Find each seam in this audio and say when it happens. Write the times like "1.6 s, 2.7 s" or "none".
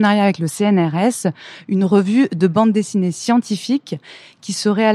none